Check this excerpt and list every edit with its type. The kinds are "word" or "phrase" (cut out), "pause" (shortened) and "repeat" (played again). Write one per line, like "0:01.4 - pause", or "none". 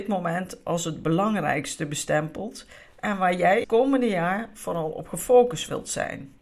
0:03.6 - word

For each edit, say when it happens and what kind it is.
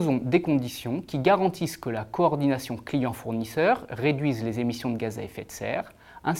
none

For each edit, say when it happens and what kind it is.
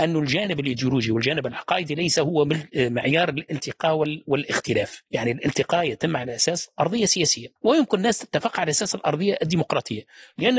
0:05.1 - pause
0:07.6 - pause

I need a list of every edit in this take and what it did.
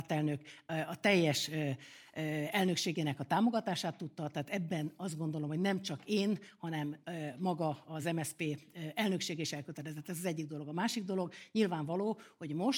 none

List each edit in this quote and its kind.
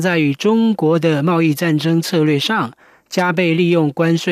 none

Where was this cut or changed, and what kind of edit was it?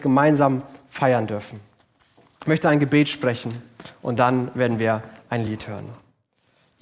none

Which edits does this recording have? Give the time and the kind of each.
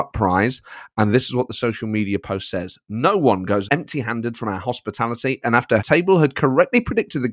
0:03.7 - word
0:05.8 - word

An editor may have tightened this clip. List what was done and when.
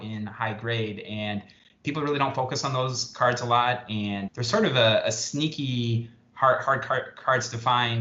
0:04.3 - word

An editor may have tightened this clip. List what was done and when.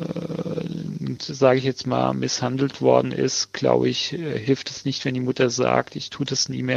0:01.2 - word

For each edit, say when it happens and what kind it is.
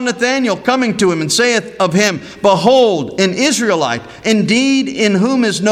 none

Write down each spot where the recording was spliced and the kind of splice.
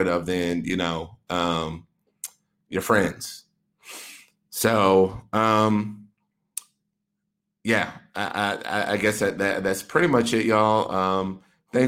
none

